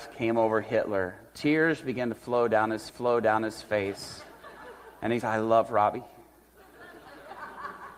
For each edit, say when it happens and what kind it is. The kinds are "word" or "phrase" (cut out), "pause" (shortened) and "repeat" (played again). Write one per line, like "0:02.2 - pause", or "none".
0:02.9 - repeat
0:05.2 - word